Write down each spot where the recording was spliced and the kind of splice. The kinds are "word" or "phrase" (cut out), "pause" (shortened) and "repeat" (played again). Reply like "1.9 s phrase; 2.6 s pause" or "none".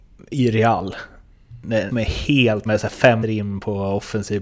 1.9 s word; 2.7 s phrase; 3.2 s word